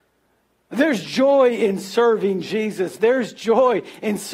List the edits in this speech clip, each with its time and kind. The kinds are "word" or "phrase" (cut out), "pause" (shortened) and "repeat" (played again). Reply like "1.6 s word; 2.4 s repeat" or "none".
none